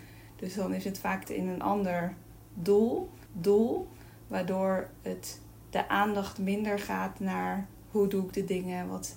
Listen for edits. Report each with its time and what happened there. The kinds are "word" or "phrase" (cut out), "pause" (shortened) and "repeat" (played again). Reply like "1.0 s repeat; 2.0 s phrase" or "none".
1.2 s word; 3.3 s repeat